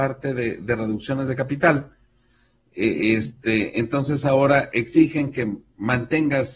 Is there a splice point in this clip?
no; 0 cuts

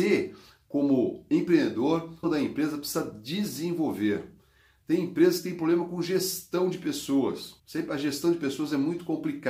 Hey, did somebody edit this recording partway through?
yes; 2 cuts; at 2.2 s, 7.6 s

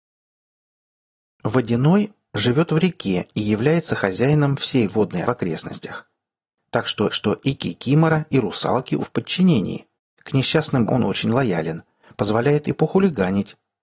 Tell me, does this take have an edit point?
yes; 5 cuts; at 5.2 s, 7.1 s, 9.0 s, 10.0 s, 10.9 s

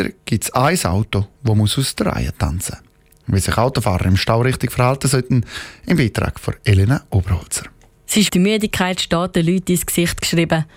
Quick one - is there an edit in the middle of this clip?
yes; 1 cut; at 8.3 s

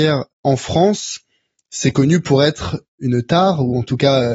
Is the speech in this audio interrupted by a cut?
no; 0 cuts

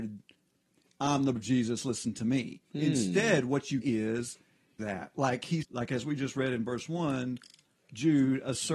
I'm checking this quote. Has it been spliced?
yes; 5 cuts; at 1.4 s, 2.6 s, 3.8 s, 4.8 s, 5.6 s

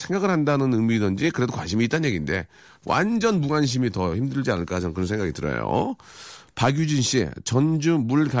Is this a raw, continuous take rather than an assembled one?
yes; 0 cuts

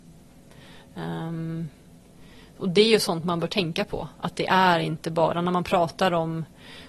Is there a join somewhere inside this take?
no; 0 cuts

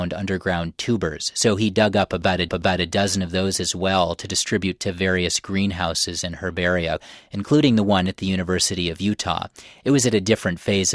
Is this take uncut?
no; 1 cut; at 2.5 s

